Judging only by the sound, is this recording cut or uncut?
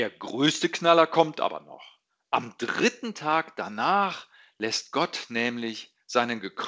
uncut